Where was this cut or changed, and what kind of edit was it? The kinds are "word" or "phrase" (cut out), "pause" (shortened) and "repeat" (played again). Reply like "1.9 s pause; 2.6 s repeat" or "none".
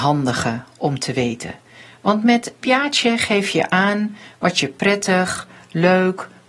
2.6 s word